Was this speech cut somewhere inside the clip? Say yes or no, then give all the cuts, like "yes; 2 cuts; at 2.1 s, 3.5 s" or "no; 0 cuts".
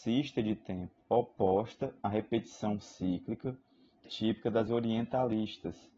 yes; 3 cuts; at 1.0 s, 4.0 s, 4.7 s